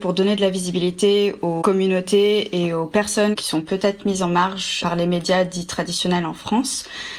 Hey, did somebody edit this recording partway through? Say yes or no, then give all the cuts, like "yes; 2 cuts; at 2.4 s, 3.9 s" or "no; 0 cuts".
no; 0 cuts